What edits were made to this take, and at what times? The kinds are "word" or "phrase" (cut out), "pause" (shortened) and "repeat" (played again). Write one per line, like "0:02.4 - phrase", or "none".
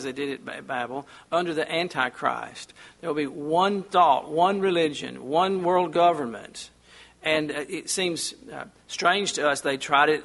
none